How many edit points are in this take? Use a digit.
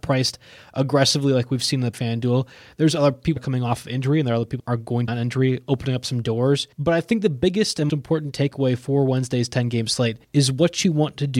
7